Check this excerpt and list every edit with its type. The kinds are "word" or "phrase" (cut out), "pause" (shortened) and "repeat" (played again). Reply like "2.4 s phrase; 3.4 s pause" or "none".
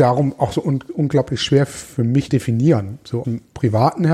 2.3 s word; 3.2 s word